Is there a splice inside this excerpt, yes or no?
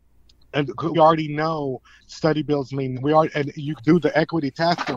yes